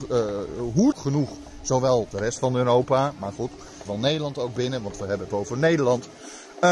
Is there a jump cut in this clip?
yes; 4 cuts; at 0.9 s, 2.1 s, 3.9 s, 5.3 s

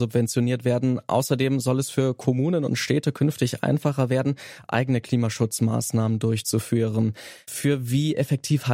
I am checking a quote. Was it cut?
no; 0 cuts

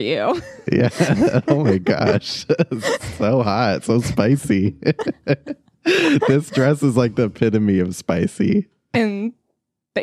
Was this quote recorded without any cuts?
yes; 0 cuts

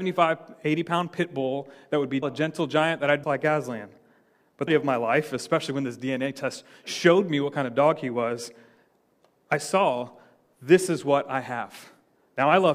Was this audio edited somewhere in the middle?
yes; 3 cuts; at 2.2 s, 3.2 s, 4.7 s

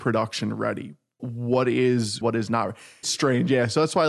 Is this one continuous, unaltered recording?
no; 3 cuts; at 1.2 s, 2.2 s, 3.0 s

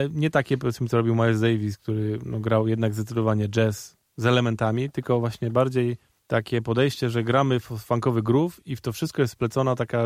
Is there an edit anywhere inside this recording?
no; 0 cuts

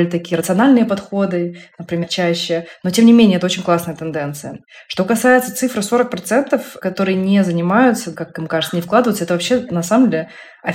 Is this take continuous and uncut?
yes; 0 cuts

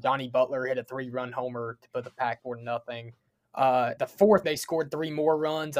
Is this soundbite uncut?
no; 3 cuts; at 2.4 s, 4.0 s, 4.4 s

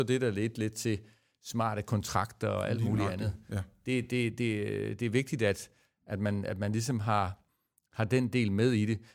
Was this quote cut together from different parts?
no; 0 cuts

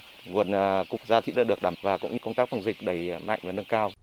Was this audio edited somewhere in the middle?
yes; 5 cuts; at 1.0 s, 1.3 s, 1.7 s, 2.2 s, 2.8 s

